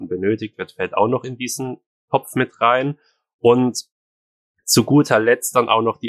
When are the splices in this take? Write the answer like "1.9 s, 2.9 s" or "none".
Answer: none